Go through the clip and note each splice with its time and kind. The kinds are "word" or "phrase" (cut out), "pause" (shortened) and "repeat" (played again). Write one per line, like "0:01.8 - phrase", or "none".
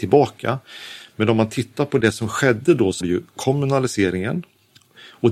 0:03.0 - word